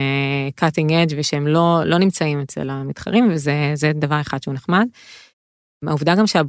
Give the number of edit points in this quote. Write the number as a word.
zero